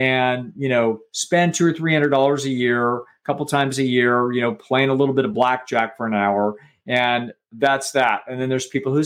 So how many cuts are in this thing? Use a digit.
0